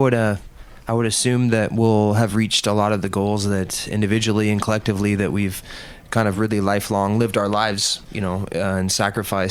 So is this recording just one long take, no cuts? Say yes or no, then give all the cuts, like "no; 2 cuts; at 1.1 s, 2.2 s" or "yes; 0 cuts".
yes; 0 cuts